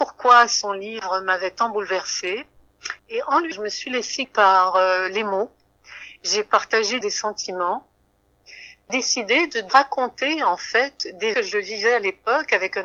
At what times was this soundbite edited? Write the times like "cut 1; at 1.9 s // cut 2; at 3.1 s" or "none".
cut 1; at 3.0 s // cut 2; at 3.5 s // cut 3; at 4.2 s // cut 4; at 7.0 s // cut 5; at 8.9 s // cut 6; at 9.7 s // cut 7; at 11.3 s